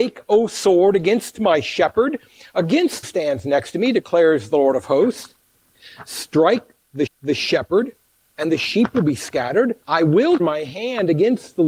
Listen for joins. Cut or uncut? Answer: cut